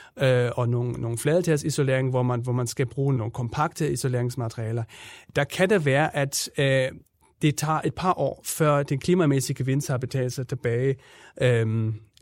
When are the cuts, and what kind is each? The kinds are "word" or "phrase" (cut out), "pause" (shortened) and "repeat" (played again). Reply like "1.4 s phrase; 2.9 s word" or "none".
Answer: 3.2 s word